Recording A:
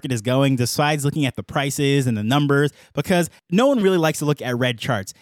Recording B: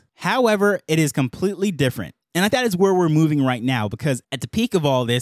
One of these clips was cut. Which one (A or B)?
B